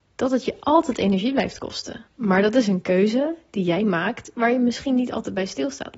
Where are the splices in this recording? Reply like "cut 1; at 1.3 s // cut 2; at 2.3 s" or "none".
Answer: cut 1; at 2.1 s